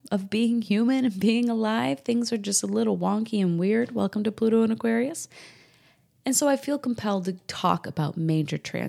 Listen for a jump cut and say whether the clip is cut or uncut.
uncut